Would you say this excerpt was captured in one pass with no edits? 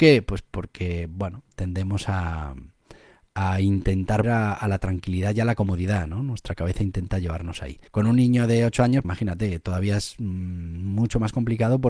no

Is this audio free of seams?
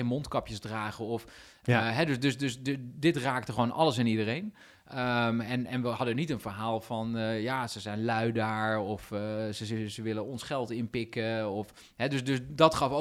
yes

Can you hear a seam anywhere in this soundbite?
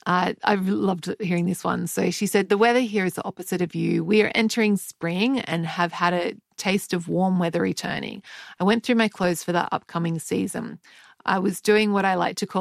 no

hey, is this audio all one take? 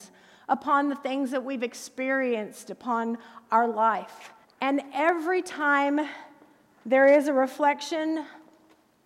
no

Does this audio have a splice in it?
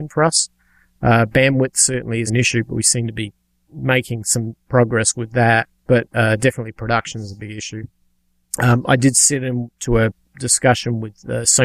yes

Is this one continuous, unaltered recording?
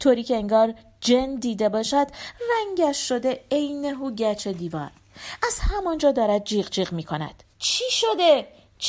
no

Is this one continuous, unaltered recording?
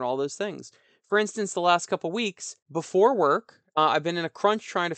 no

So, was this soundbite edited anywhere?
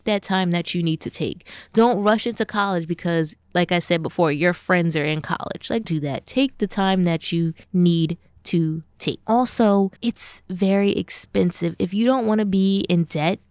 yes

